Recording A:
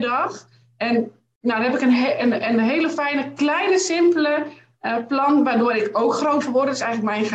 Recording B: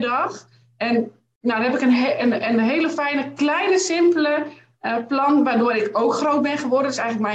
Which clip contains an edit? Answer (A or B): A